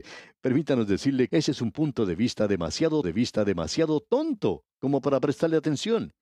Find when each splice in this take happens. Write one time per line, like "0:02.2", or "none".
0:01.3
0:03.0